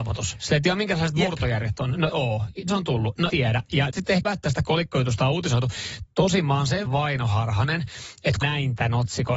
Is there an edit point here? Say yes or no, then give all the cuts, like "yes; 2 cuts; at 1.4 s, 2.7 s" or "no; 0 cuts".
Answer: yes; 7 cuts; at 2.1 s, 2.7 s, 3.3 s, 3.9 s, 4.2 s, 6.9 s, 8.4 s